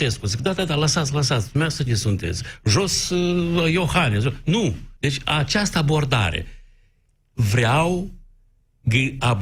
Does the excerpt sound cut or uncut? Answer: cut